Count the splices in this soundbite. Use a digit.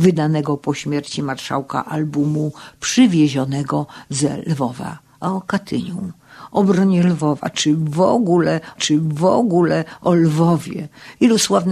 1